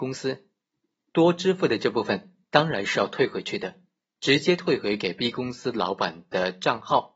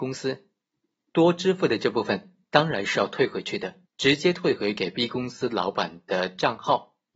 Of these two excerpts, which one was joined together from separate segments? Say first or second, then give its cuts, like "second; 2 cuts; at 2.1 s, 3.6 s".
second; 1 cut; at 3.9 s